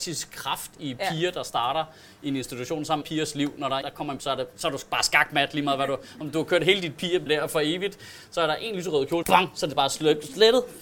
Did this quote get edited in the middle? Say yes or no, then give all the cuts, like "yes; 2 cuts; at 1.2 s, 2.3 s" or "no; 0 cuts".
yes; 5 cuts; at 3.0 s, 3.8 s, 4.2 s, 7.3 s, 9.2 s